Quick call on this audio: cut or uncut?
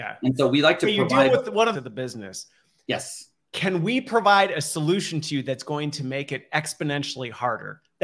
cut